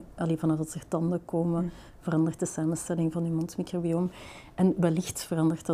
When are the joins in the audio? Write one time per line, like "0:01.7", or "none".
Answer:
none